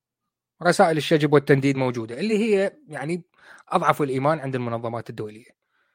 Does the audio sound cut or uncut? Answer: uncut